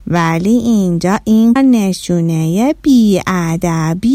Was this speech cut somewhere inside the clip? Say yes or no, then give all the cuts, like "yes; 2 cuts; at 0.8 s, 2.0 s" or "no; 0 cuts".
yes; 1 cut; at 1.6 s